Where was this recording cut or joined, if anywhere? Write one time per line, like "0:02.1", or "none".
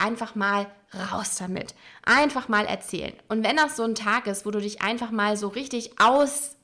none